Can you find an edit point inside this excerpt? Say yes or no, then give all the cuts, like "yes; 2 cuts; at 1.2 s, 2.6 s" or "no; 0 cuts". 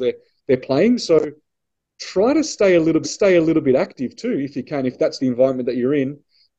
yes; 2 cuts; at 3.0 s, 5.2 s